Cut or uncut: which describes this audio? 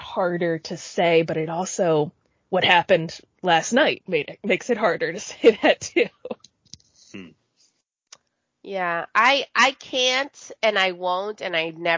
uncut